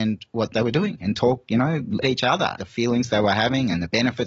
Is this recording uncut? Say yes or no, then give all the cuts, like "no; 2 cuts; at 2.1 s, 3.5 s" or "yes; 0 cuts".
no; 2 cuts; at 2.0 s, 2.6 s